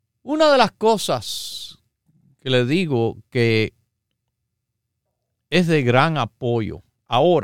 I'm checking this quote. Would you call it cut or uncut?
uncut